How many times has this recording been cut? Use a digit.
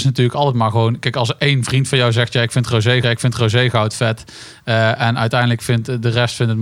1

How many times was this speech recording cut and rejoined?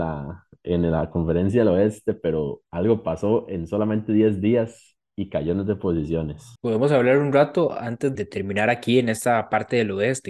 3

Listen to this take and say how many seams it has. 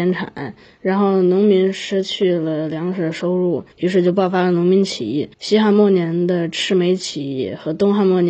2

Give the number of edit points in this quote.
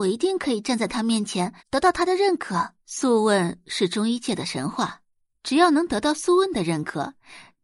3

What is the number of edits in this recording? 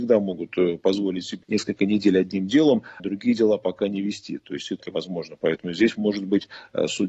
3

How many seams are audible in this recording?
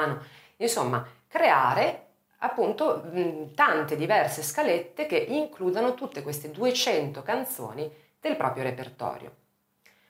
0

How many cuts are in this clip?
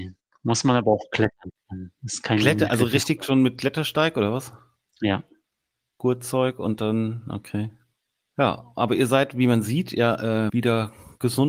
1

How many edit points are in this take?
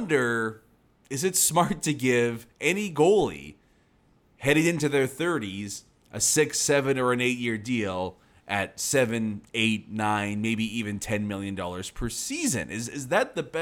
0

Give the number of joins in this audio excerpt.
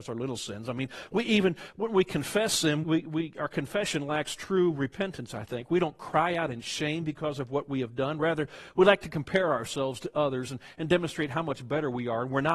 1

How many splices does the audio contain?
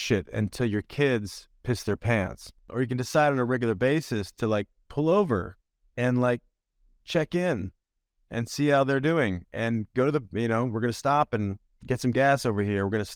0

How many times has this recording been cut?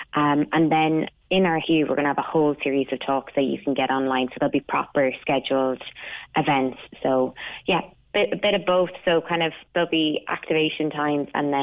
4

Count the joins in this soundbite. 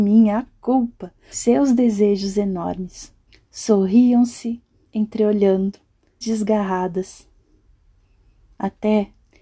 3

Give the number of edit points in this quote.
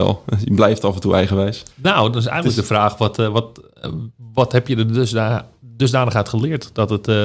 1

